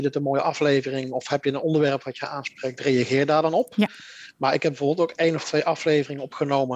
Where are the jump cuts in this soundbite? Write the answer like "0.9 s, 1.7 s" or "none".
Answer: none